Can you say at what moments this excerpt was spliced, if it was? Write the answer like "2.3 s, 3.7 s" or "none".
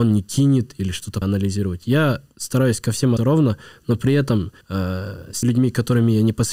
1.2 s, 3.2 s, 4.6 s, 5.4 s